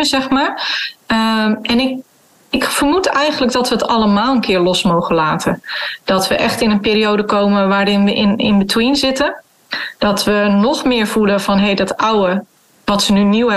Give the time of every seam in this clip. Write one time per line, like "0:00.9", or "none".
none